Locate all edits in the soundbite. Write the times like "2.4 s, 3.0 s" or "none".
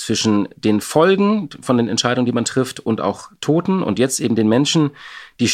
none